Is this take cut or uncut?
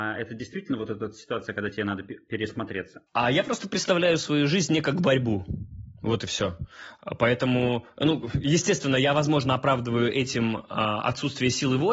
cut